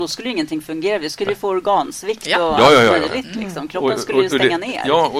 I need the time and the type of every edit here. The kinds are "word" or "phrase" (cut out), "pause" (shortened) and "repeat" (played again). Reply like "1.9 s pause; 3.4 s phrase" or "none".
none